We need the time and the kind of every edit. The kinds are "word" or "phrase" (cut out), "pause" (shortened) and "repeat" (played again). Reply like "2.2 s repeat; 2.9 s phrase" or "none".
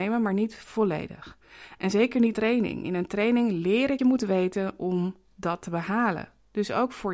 2.3 s phrase; 4.0 s phrase